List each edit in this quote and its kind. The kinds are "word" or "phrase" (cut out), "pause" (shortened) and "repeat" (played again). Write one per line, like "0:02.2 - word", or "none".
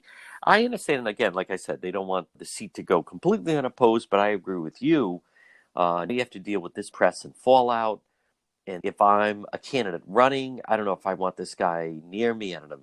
0:02.4 - word
0:06.1 - word
0:06.9 - word
0:08.8 - word